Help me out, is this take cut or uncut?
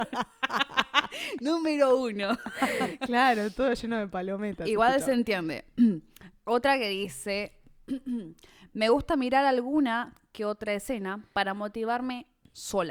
uncut